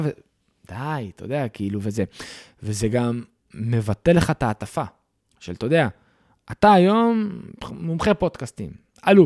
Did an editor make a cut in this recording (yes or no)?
yes